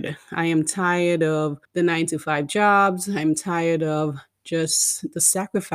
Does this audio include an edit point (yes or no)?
yes